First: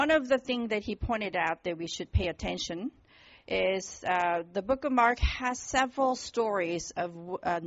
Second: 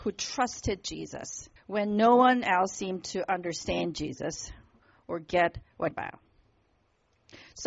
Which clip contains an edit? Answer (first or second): second